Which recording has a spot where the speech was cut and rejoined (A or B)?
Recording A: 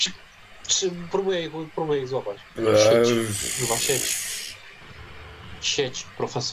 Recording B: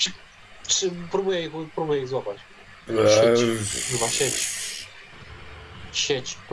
A